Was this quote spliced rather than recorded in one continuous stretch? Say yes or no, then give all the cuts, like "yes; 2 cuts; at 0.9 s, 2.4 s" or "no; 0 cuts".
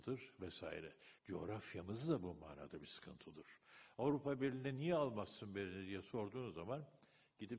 yes; 1 cut; at 1.2 s